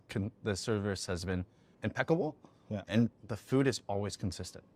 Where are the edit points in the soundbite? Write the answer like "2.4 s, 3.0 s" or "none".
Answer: 1.7 s